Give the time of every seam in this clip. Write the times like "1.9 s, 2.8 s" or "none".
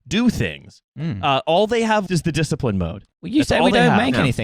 2.1 s